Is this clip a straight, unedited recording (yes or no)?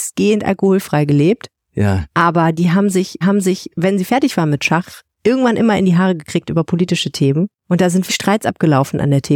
no